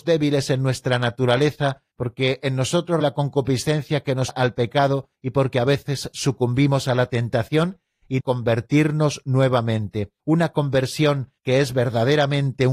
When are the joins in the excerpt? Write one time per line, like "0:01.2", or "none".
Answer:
0:01.9
0:03.0
0:04.3
0:05.1
0:08.2
0:10.2
0:11.4